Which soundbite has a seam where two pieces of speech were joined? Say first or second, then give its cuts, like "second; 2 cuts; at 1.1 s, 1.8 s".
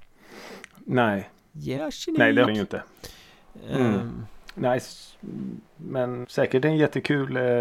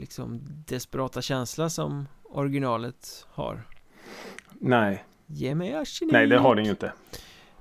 first; 3 cuts; at 1.8 s, 2.5 s, 6.2 s